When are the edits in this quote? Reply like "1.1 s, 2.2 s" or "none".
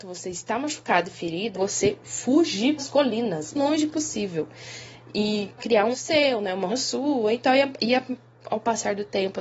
1.5 s, 2.8 s, 3.5 s, 5.6 s, 5.9 s, 6.7 s